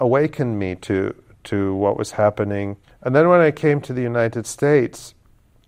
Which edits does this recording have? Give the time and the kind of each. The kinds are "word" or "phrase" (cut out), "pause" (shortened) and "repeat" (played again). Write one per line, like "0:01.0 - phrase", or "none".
0:02.8 - pause